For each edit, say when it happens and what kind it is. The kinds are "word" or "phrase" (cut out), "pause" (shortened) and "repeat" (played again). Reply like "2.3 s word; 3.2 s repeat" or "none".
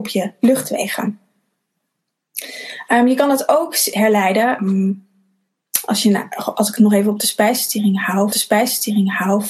4.6 s word; 8.3 s repeat